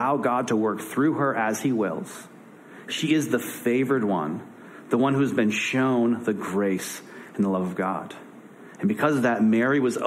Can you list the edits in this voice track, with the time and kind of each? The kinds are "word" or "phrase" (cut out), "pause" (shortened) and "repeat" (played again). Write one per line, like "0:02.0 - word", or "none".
none